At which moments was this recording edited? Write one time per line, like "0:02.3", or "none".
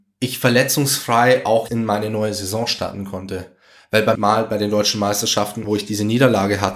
0:01.7
0:04.1
0:05.6